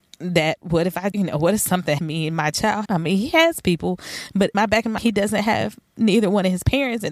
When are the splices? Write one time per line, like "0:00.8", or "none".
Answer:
0:01.1
0:02.0
0:02.8
0:04.5
0:05.0

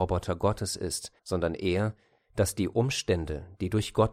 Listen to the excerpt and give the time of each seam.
0:01.2

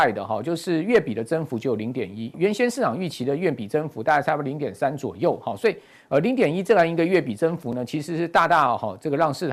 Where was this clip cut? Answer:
0:02.3

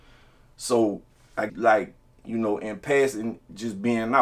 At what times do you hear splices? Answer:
0:01.5

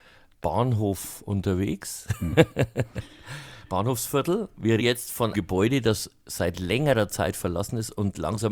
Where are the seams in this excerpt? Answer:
0:04.8
0:05.3

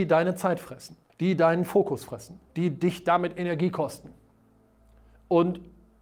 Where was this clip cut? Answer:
0:01.1
0:02.5

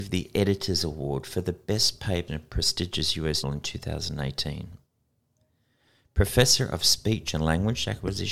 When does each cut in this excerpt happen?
0:02.3
0:03.4

